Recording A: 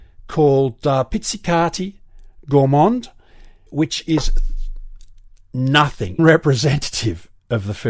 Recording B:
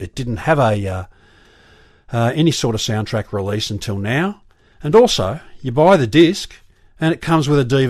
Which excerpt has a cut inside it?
A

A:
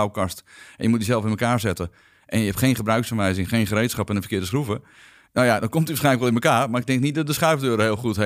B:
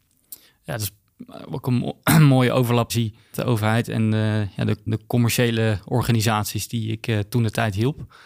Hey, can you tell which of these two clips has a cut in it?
B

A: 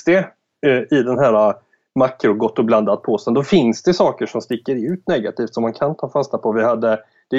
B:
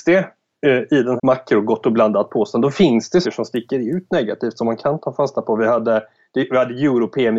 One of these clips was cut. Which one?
B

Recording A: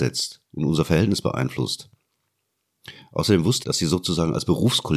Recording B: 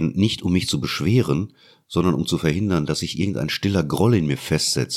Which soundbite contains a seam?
A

